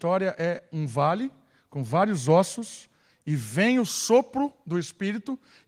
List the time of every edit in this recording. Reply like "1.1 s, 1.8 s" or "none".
none